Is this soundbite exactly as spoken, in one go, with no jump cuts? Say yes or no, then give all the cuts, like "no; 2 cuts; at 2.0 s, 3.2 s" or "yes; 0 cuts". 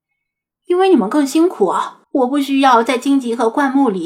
no; 1 cut; at 2.0 s